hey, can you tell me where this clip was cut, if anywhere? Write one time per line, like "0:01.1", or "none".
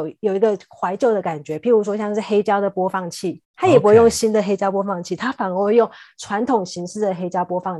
0:03.4